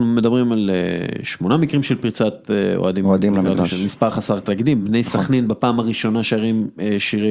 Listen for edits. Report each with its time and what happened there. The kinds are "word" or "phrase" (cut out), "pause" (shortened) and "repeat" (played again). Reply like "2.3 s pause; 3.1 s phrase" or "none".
none